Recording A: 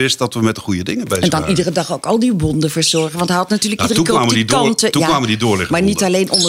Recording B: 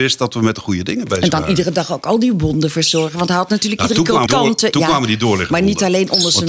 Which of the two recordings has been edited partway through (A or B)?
B